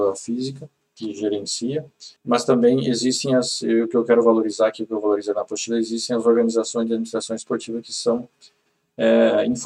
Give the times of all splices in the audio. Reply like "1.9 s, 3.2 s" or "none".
2.2 s